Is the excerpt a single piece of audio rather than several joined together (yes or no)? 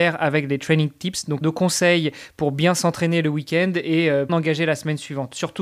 no